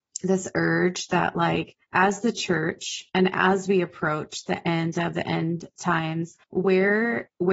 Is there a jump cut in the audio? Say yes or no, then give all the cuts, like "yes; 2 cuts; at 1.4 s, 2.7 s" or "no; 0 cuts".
yes; 3 cuts; at 1.8 s, 3.1 s, 6.4 s